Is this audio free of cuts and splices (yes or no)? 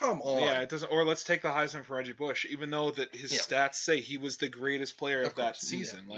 yes